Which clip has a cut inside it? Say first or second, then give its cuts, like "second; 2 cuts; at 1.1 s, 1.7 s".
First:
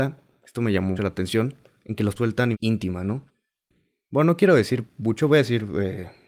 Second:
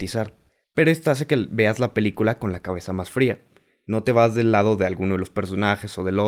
first; 3 cuts; at 1.0 s, 2.2 s, 2.5 s